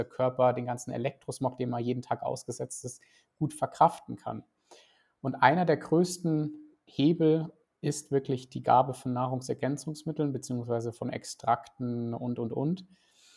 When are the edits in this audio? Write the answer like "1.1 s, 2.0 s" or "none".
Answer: none